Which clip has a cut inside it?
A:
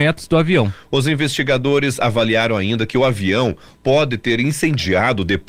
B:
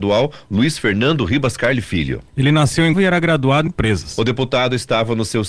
B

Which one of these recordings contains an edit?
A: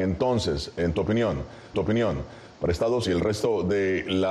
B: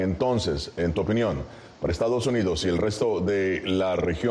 A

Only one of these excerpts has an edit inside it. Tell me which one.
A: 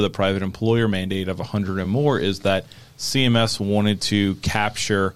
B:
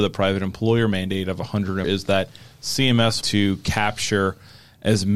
B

